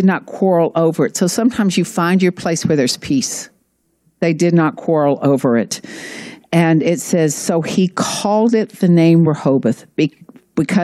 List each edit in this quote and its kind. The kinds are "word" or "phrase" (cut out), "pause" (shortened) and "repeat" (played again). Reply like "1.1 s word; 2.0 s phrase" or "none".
none